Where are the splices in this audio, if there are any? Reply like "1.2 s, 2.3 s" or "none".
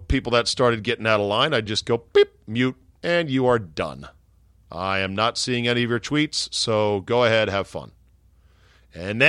none